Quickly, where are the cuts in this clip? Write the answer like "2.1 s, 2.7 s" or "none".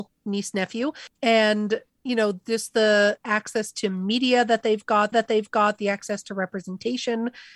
1.9 s, 5.1 s